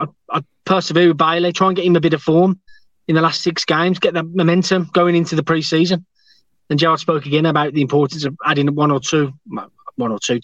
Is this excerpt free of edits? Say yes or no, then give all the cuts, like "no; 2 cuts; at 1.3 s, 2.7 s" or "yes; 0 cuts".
yes; 0 cuts